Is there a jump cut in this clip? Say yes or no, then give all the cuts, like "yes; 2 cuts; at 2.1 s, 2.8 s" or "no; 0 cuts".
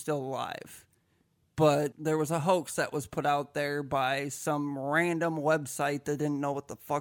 no; 0 cuts